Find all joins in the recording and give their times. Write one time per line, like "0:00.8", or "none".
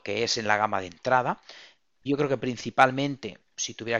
none